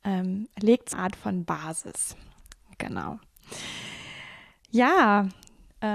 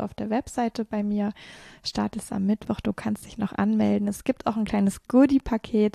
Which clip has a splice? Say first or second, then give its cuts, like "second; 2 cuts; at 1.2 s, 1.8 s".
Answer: first; 1 cut; at 0.9 s